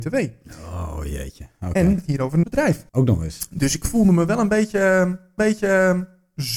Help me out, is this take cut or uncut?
cut